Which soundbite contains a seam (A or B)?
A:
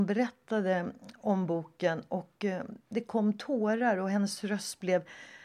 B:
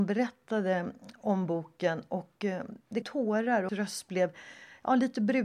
B